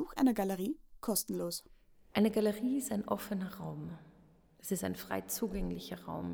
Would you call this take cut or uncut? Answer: uncut